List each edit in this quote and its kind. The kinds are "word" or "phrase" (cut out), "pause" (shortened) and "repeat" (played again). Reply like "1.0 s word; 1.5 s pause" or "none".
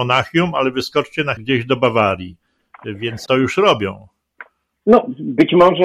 1.4 s word; 3.3 s word